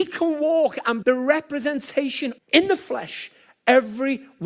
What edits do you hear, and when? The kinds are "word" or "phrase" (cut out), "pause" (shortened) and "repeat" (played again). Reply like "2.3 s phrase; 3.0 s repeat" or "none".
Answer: 1.0 s word; 2.4 s phrase